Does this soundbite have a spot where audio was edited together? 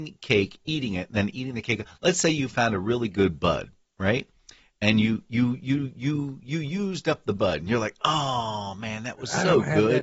no; 0 cuts

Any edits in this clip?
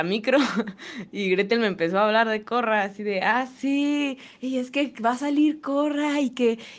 no; 0 cuts

